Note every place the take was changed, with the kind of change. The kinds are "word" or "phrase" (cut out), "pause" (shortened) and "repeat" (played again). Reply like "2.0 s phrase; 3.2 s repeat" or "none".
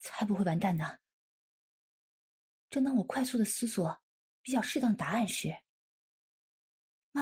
none